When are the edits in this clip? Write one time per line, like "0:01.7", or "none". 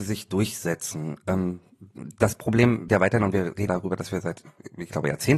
0:02.9
0:03.7